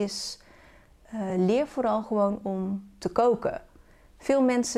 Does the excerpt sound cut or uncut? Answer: uncut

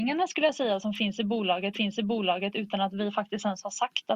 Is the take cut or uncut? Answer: cut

